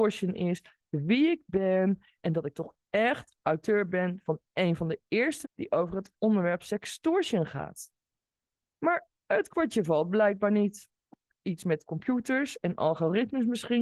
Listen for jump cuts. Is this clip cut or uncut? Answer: cut